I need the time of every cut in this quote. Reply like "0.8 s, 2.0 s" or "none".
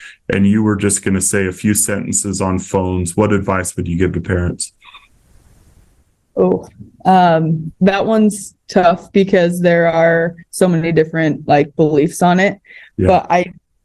7.7 s, 8.6 s, 10.4 s